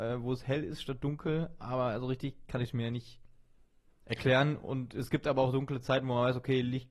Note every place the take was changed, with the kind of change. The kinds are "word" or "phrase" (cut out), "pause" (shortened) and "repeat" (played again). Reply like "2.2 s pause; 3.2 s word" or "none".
none